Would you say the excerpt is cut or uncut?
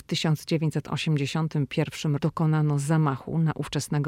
cut